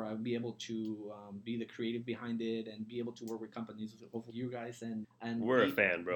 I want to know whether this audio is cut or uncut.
cut